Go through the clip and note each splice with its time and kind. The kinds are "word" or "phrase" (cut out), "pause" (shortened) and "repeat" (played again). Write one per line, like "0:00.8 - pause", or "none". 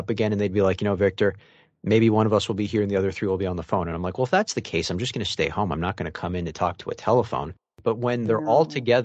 none